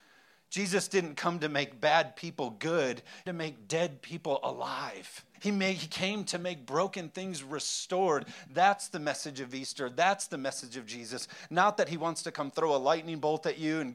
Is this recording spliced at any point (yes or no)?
yes